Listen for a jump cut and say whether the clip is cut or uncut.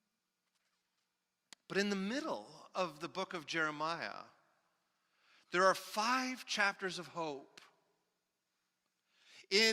uncut